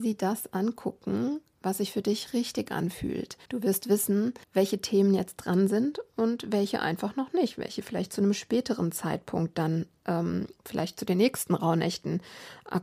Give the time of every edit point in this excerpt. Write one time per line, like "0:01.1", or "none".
0:03.4
0:04.4
0:10.6